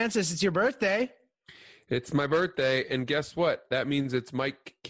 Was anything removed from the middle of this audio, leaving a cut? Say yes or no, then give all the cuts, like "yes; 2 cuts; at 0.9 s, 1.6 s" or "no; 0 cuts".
no; 0 cuts